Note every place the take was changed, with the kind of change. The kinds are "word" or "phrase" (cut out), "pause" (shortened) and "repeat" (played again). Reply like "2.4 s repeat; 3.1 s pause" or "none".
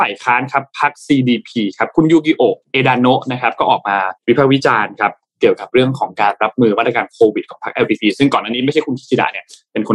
2.6 s pause; 4.2 s pause